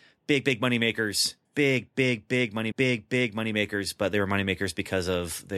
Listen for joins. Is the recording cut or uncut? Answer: cut